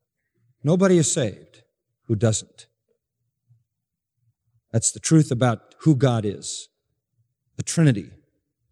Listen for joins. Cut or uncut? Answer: uncut